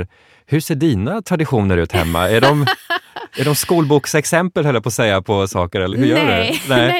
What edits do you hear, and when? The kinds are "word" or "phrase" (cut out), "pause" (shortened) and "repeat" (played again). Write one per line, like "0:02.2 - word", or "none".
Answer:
0:05.9 - word